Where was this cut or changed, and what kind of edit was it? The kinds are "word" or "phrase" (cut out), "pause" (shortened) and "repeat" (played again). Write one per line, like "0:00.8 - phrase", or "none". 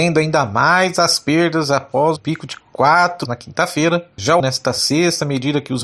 0:02.2 - word
0:03.2 - word
0:04.4 - phrase